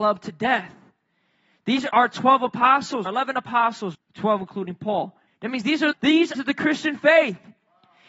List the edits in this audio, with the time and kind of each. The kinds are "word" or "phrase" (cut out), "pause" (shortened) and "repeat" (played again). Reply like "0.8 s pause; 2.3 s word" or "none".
1.9 s word; 3.1 s word; 3.9 s word; 5.3 s pause; 5.9 s word; 6.3 s phrase

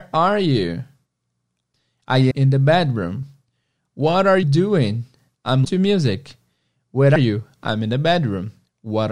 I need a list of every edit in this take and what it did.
2.3 s word; 4.4 s word; 5.6 s word; 7.2 s word

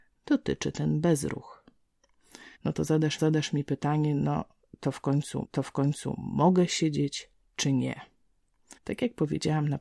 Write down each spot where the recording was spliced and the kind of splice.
2.5 s pause; 3.2 s repeat; 5.4 s repeat; 8.8 s pause

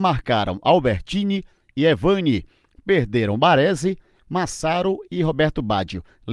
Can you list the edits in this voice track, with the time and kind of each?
none

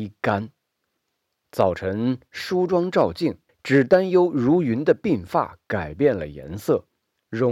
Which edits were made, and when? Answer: 3.5 s pause

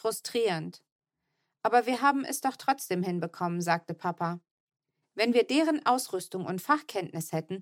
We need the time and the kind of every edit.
none

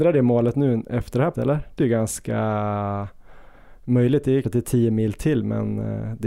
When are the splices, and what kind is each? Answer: 1.3 s word; 1.8 s word; 4.4 s word

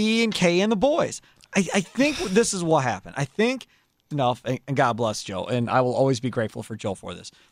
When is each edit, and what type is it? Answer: 4.1 s phrase

